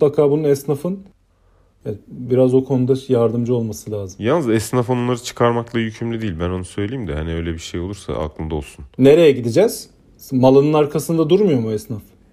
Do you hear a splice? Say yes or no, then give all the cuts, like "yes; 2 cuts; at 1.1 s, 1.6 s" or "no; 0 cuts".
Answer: no; 0 cuts